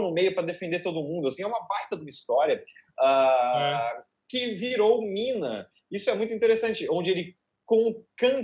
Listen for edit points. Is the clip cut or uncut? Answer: uncut